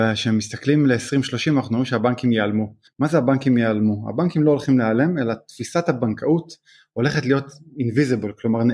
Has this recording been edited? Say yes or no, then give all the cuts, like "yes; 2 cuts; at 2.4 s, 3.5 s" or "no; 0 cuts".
no; 0 cuts